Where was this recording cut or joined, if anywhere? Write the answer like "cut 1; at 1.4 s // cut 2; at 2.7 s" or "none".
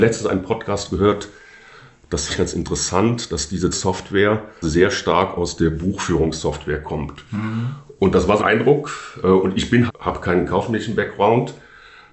cut 1; at 2.3 s // cut 2; at 3.7 s // cut 3; at 4.6 s // cut 4; at 8.4 s // cut 5; at 9.9 s